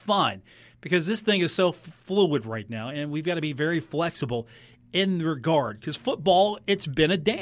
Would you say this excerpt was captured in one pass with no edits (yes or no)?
yes